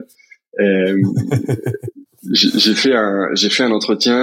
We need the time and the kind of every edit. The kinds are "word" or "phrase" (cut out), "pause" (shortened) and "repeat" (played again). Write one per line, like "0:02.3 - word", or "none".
none